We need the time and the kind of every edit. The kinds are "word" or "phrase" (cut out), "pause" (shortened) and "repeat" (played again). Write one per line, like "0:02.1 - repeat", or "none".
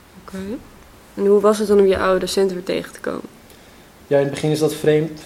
none